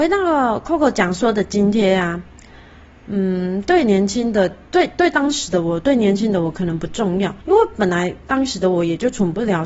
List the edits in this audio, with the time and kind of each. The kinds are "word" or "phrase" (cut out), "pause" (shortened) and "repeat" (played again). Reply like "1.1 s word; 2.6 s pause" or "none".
7.4 s pause